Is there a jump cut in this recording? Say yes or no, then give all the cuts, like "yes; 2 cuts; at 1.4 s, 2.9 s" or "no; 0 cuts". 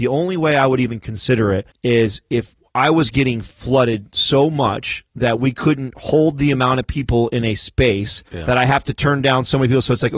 yes; 2 cuts; at 1.7 s, 8.3 s